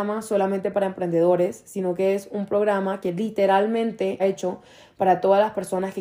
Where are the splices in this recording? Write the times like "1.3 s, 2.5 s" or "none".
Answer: 4.2 s